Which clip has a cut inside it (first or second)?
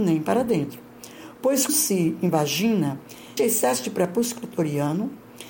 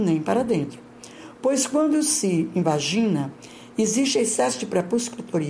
first